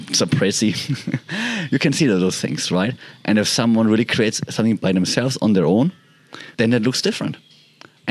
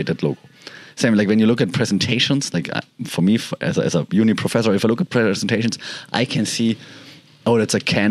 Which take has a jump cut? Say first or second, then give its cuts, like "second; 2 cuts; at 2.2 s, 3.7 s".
first; 1 cut; at 6.5 s